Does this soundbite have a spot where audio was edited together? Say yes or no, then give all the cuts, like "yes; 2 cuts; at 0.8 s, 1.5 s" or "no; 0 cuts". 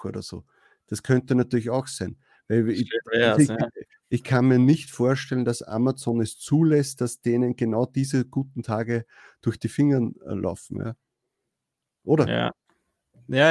no; 0 cuts